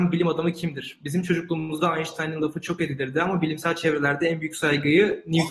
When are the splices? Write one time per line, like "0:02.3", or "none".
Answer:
none